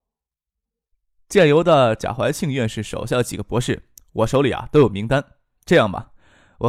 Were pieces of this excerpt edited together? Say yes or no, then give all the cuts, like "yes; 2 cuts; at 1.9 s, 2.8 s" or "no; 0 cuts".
no; 0 cuts